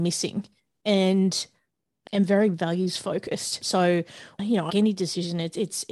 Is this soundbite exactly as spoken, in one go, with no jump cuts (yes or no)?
no